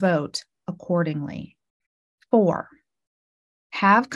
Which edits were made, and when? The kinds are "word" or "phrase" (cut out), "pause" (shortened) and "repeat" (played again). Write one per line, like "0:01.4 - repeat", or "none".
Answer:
0:01.9 - pause

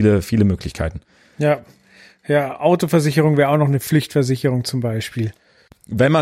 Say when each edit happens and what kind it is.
none

